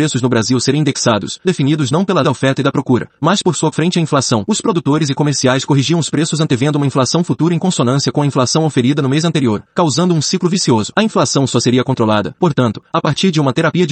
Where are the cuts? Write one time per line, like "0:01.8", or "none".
0:01.4
0:02.2
0:03.7